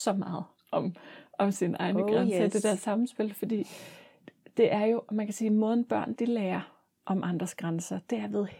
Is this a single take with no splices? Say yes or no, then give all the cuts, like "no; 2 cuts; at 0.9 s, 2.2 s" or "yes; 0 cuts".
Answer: yes; 0 cuts